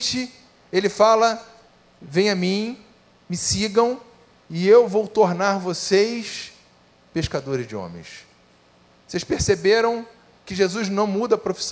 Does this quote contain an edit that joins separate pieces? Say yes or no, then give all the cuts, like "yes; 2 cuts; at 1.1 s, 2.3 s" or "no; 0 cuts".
no; 0 cuts